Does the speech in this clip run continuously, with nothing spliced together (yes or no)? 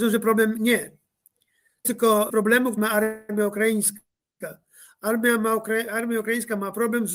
no